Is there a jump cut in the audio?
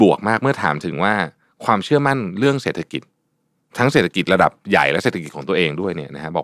no; 0 cuts

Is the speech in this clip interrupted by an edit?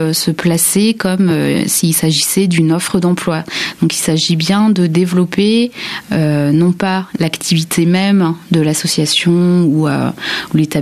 no; 0 cuts

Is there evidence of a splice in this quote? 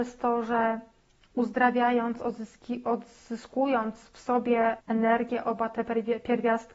yes; 2 cuts; at 4.0 s, 4.8 s

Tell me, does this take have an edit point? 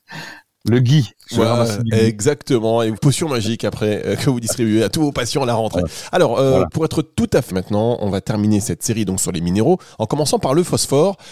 yes; 2 cuts; at 3.0 s, 7.5 s

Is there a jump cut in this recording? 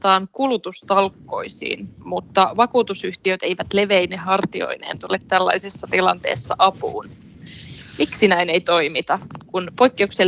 no; 0 cuts

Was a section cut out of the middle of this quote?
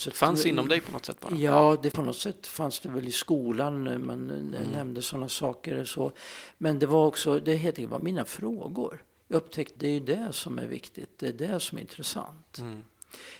yes; 2 cuts; at 1.9 s, 9.8 s

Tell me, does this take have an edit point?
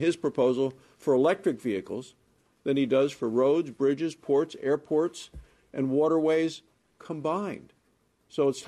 no; 0 cuts

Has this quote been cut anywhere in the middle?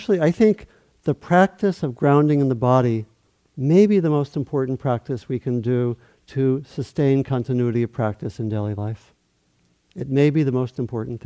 no; 0 cuts

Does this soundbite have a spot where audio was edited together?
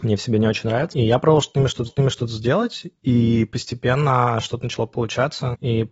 yes; 1 cut; at 1.9 s

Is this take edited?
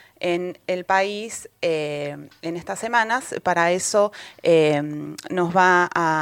no; 0 cuts

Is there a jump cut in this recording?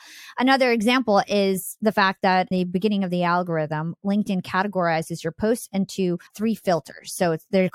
yes; 2 cuts; at 2.5 s, 6.3 s

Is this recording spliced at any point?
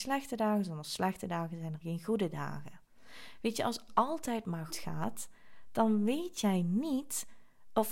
yes; 2 cuts; at 3.9 s, 4.7 s

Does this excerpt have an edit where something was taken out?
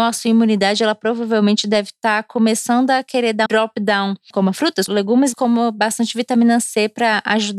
yes; 3 cuts; at 3.5 s, 4.9 s, 5.3 s

